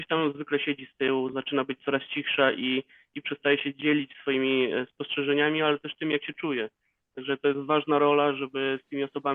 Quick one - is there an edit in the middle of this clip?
no; 0 cuts

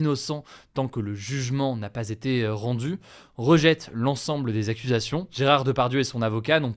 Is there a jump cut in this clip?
no; 0 cuts

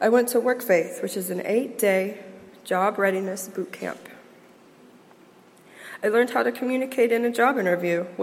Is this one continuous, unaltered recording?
yes; 0 cuts

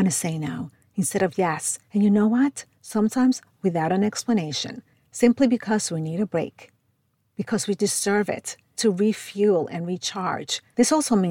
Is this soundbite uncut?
no; 3 cuts; at 1.9 s, 2.7 s, 8.8 s

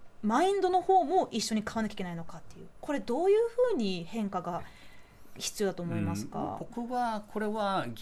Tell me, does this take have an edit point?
no; 0 cuts

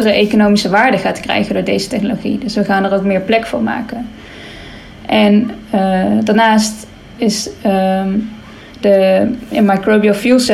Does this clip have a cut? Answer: no; 0 cuts

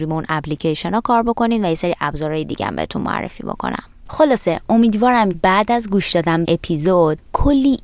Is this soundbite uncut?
no; 2 cuts; at 5.3 s, 6.4 s

